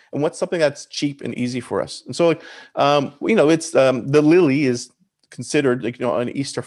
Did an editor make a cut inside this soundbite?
no; 0 cuts

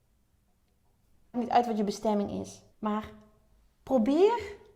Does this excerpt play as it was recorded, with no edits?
no; 2 cuts; at 1.3 s, 2.7 s

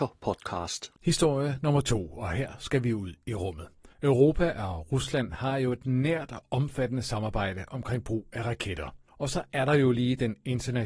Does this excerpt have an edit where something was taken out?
yes; 2 cuts; at 3.9 s, 9.1 s

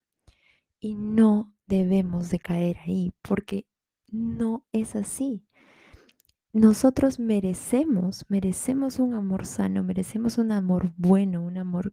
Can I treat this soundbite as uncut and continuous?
yes; 0 cuts

